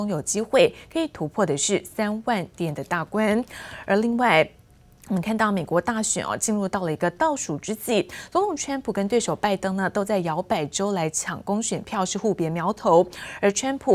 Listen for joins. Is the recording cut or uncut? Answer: uncut